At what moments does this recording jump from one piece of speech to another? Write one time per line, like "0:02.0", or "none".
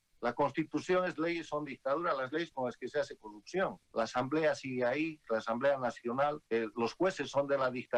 0:01.1
0:01.7
0:03.8
0:06.5